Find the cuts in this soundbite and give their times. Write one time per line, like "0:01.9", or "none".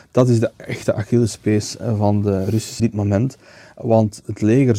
0:02.8